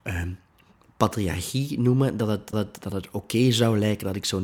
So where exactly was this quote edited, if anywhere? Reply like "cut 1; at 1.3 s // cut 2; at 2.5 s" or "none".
cut 1; at 2.5 s